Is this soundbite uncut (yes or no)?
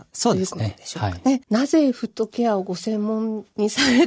no